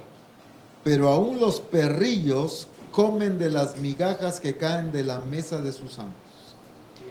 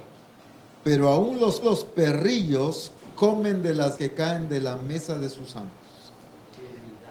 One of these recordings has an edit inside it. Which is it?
second; 2 cuts; at 1.6 s, 4.0 s

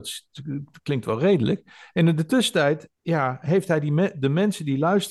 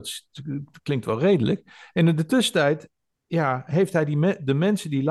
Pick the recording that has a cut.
first; 1 cut; at 3.0 s

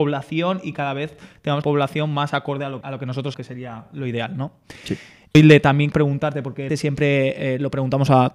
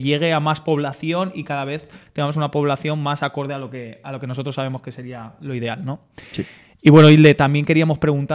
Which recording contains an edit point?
first; 6 cuts; at 1.6 s, 2.8 s, 3.3 s, 5.3 s, 5.9 s, 6.7 s

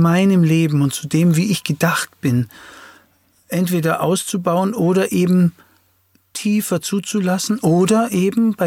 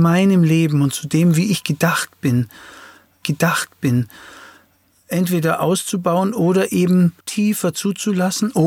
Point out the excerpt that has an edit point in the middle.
second; 2 cuts; at 3.2 s, 7.2 s

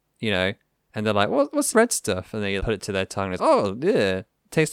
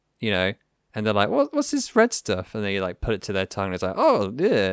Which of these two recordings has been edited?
first; 3 cuts; at 1.7 s, 2.6 s, 3.4 s

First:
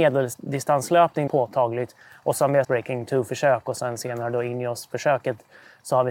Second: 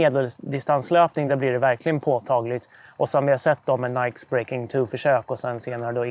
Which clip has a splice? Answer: first; 2 cuts; at 1.3 s, 2.6 s

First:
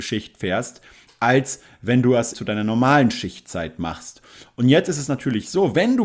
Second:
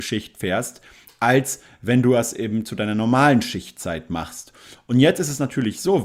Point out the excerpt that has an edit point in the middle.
first; 1 cut; at 2.3 s

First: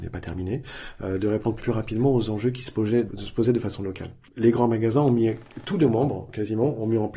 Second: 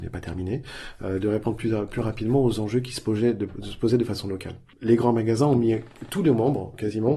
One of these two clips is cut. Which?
first; 2 cuts; at 1.6 s, 3.1 s

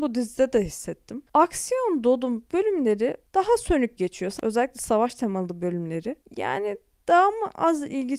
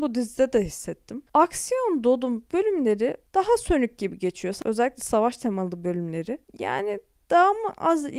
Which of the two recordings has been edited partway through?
first; 1 cut; at 4.0 s

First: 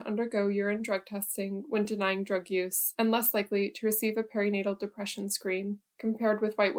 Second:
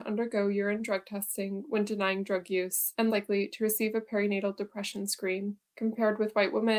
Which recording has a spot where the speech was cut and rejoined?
second; 1 cut; at 3.1 s

